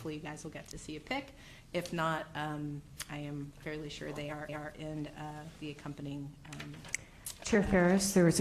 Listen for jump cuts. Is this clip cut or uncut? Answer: cut